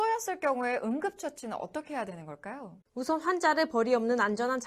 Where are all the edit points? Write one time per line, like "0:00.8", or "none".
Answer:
0:02.8

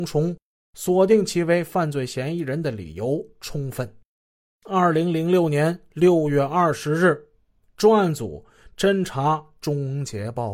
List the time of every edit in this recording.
none

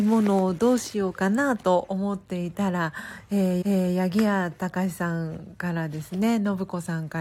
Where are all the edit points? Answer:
0:03.6

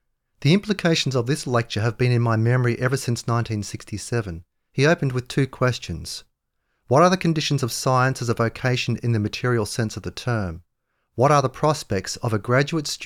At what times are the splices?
none

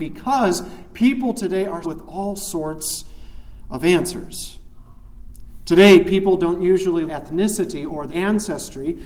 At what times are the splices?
0:01.8
0:07.1
0:08.1

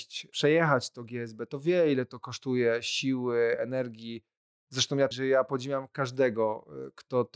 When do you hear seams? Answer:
0:05.1

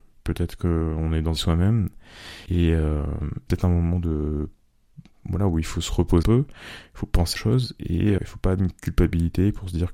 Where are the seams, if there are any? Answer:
0:01.4
0:02.5
0:03.5
0:06.2
0:07.4
0:08.2
0:08.6

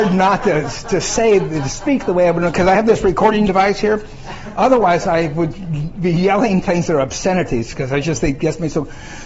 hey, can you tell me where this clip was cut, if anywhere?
none

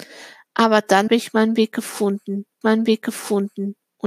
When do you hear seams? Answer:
0:01.1
0:02.6

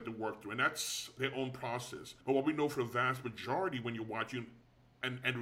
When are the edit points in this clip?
0:02.2

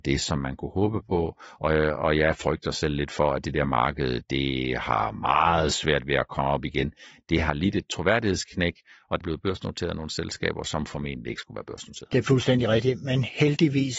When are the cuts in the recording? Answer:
0:09.2

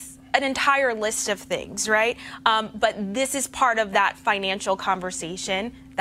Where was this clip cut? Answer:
none

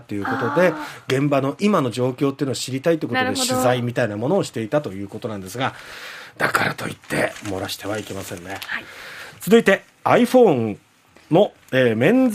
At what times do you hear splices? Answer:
none

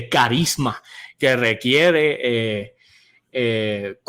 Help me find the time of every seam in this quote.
none

